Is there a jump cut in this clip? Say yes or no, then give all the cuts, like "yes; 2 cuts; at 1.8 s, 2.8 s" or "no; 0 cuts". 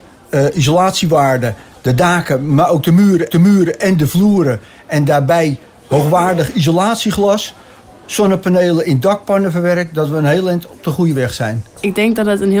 yes; 1 cut; at 3.3 s